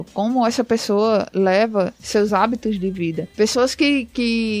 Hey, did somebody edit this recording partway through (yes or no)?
no